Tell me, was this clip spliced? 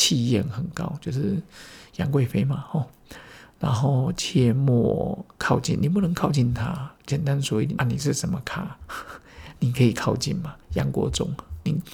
yes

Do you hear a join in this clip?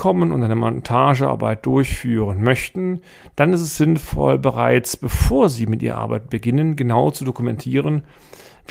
no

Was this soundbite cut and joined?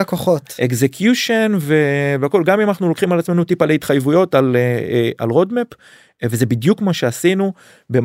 no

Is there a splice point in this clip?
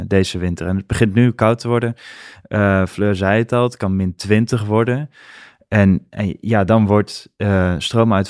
no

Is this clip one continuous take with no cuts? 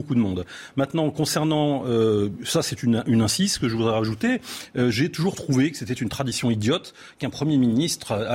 yes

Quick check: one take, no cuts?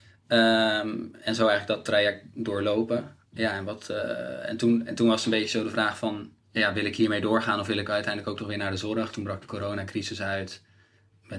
no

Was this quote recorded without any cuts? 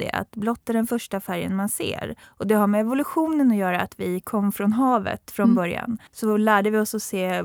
no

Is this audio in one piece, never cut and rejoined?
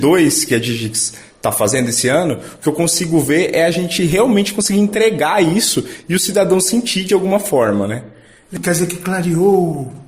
yes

